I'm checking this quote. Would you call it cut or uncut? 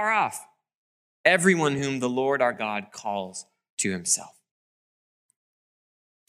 uncut